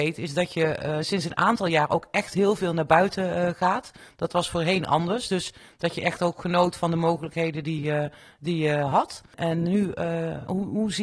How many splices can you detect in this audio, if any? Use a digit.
0